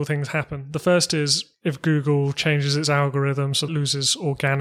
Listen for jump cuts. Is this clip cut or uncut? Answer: cut